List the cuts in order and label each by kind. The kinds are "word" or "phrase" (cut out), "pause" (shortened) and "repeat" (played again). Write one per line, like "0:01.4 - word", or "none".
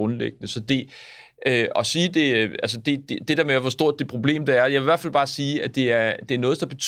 none